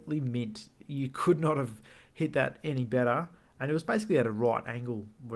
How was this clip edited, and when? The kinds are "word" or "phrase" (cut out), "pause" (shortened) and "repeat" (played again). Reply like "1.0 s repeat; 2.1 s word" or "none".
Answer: none